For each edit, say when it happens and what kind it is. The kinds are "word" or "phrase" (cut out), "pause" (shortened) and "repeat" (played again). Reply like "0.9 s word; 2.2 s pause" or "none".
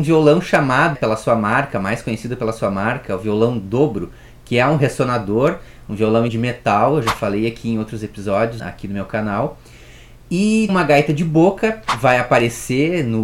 0.9 s word; 6.3 s word; 8.6 s word; 10.7 s word